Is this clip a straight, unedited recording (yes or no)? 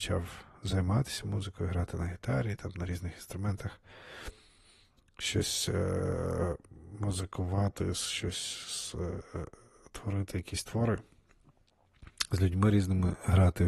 yes